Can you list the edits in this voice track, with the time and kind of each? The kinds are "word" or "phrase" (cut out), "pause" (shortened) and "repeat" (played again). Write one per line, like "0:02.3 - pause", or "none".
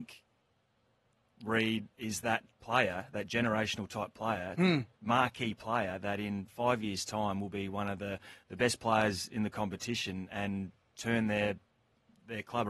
0:01.9 - pause